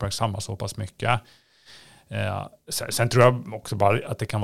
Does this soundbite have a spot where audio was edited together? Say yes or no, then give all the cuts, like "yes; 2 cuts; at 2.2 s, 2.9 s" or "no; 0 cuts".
no; 0 cuts